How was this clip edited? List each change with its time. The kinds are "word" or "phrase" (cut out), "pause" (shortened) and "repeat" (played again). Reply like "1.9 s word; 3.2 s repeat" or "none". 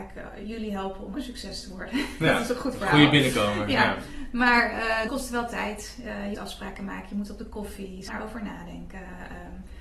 1.1 s word; 5.1 s word; 6.3 s word; 8.1 s word